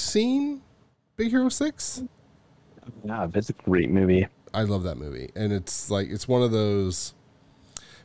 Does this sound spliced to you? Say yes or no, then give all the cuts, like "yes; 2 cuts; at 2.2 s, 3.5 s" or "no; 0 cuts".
no; 0 cuts